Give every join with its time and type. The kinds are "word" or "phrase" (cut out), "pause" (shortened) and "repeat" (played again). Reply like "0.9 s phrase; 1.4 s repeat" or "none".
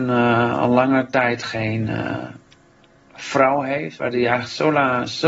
none